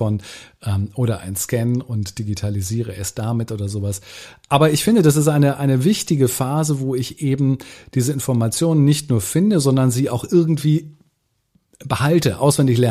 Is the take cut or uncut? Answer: uncut